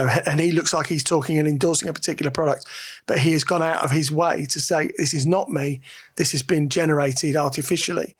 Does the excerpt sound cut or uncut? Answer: uncut